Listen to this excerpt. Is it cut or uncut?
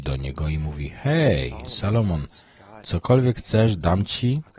uncut